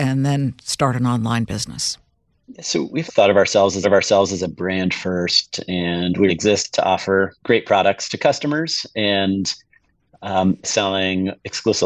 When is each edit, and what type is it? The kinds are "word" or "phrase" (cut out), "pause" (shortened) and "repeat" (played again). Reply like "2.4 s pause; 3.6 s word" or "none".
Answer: 3.1 s word; 3.8 s repeat; 6.3 s word; 7.4 s pause; 10.6 s phrase

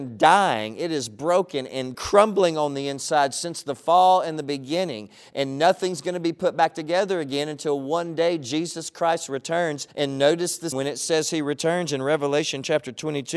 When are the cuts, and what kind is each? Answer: 1.9 s word; 9.9 s pause; 10.7 s word

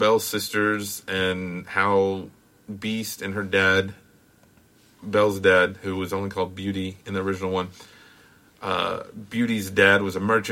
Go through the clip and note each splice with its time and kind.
none

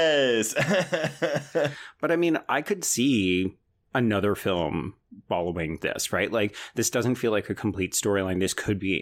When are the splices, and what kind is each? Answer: none

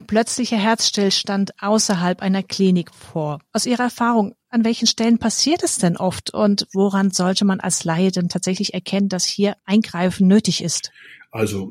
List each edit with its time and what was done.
9.6 s pause

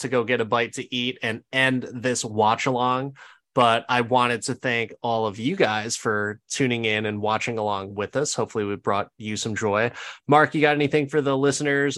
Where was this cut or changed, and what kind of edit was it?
none

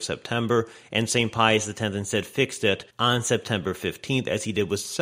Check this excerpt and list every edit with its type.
2.9 s pause

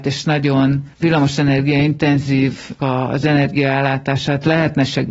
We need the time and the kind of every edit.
0.9 s pause; 2.8 s word

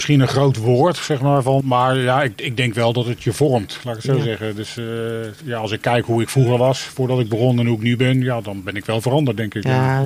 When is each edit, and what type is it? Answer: 1.6 s word

